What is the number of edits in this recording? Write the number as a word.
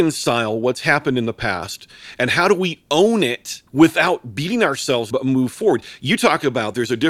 two